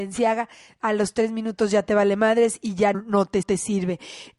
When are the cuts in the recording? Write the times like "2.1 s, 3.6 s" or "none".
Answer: 2.9 s, 3.4 s